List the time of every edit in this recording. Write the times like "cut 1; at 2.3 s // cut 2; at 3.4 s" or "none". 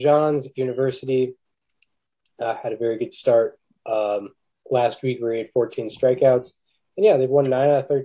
none